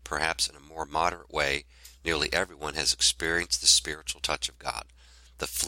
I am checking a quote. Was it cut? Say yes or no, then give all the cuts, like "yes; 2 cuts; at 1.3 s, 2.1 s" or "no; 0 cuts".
no; 0 cuts